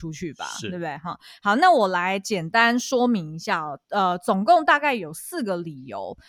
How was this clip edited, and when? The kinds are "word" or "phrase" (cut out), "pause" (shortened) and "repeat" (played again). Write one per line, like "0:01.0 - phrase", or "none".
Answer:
0:03.8 - pause